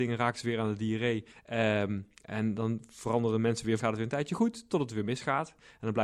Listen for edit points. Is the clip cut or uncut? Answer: cut